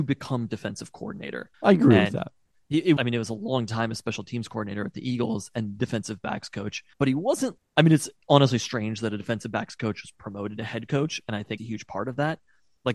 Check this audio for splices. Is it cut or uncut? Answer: cut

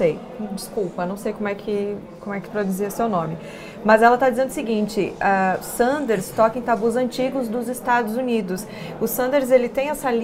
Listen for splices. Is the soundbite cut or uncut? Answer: uncut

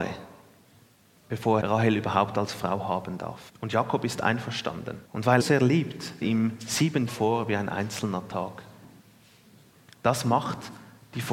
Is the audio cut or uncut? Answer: cut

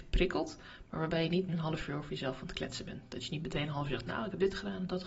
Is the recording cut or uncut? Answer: cut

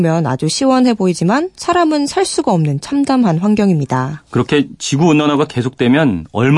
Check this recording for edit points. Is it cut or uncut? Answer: uncut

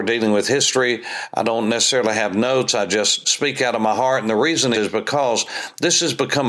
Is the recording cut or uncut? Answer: cut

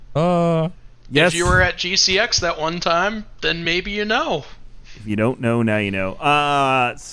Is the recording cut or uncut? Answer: uncut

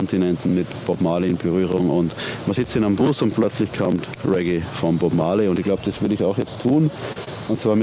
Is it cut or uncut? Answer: cut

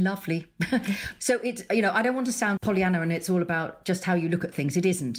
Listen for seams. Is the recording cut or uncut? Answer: cut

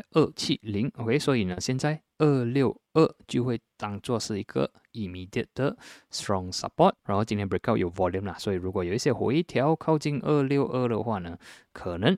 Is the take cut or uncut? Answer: cut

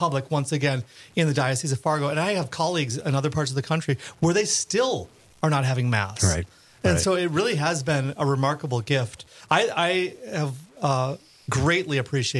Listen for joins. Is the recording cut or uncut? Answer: uncut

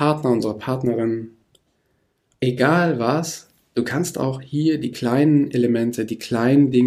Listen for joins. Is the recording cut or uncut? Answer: uncut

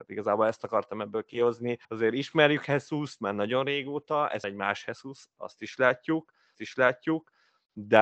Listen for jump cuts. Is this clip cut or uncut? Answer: cut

